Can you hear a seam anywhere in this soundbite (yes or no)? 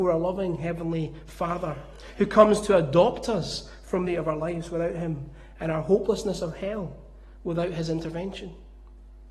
yes